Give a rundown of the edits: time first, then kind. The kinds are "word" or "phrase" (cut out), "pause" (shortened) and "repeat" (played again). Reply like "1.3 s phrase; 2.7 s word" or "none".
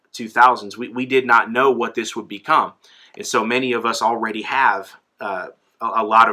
none